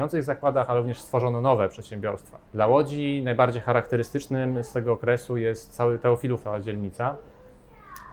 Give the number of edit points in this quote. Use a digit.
2